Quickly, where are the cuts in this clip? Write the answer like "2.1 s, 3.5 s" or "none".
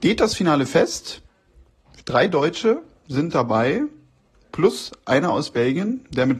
none